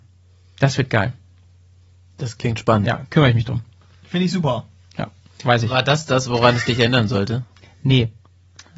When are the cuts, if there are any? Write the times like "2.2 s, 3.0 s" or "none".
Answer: none

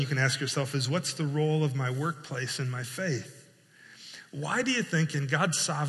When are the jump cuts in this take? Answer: none

